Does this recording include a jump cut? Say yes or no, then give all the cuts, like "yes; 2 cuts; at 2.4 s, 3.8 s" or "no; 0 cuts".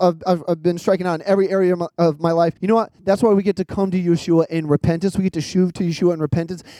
yes; 1 cut; at 2.6 s